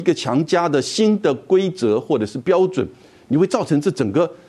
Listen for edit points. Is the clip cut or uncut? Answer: uncut